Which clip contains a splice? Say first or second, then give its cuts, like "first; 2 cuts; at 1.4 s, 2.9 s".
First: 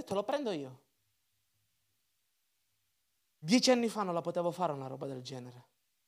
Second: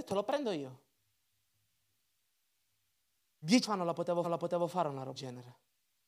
second; 3 cuts; at 3.6 s, 4.2 s, 5.1 s